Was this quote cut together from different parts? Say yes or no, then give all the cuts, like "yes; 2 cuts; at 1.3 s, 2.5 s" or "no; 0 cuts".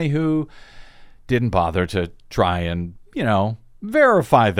no; 0 cuts